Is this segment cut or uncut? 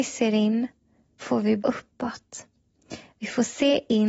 cut